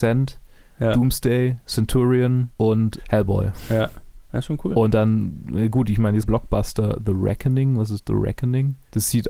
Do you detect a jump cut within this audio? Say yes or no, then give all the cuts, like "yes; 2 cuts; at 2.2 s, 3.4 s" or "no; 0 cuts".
yes; 1 cut; at 6.2 s